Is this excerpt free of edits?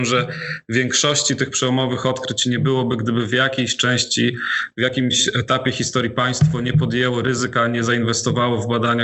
yes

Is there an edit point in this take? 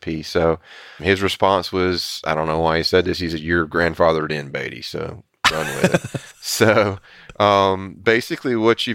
yes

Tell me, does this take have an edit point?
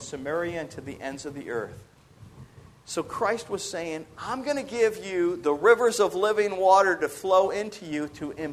no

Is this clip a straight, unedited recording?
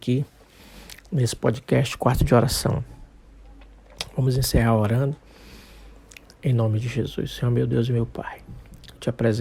yes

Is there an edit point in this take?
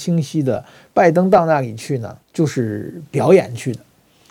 yes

